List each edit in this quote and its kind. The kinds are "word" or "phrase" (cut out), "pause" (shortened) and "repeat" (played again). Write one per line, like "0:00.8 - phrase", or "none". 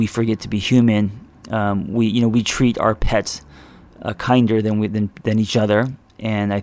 none